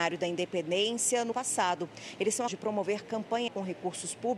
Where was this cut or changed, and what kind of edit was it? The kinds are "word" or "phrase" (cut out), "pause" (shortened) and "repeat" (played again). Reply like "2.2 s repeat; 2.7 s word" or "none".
1.3 s word; 2.5 s word; 3.5 s word